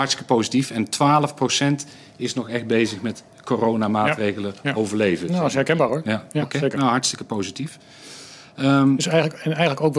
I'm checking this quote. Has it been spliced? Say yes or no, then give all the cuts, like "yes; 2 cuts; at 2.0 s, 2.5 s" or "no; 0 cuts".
no; 0 cuts